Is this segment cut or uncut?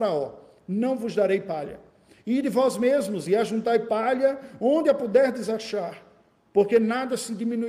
uncut